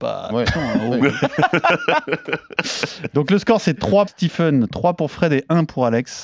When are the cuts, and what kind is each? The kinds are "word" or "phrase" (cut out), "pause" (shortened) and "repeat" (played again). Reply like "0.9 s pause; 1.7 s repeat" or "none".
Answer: 4.1 s word